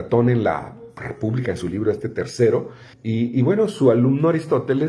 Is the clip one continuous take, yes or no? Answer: no